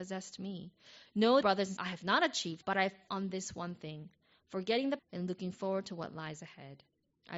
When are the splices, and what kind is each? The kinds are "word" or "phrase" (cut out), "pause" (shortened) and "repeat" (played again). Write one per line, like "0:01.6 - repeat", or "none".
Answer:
0:01.4 - word
0:01.8 - word
0:02.6 - word
0:03.1 - word
0:05.0 - word